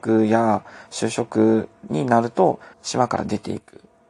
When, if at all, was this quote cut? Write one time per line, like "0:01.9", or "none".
0:02.7